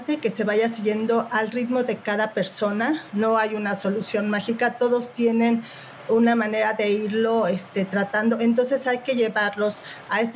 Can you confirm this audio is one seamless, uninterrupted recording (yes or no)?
yes